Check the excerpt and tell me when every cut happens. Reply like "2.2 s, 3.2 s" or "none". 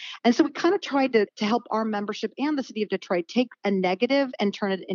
1.3 s